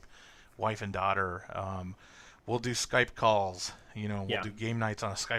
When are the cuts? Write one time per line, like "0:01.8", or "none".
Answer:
none